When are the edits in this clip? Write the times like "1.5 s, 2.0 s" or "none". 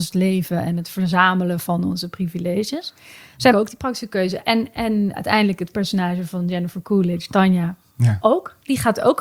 3.5 s, 5.1 s